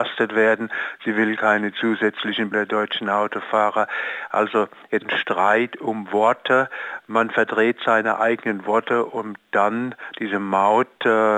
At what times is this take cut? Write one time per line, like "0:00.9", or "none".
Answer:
0:02.5
0:05.0